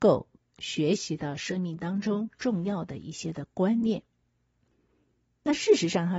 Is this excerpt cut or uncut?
cut